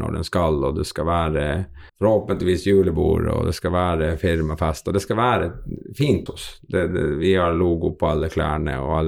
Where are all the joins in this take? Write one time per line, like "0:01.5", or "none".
0:01.9
0:06.3
0:06.9